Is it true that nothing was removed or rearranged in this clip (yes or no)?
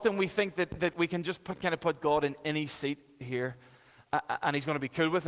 yes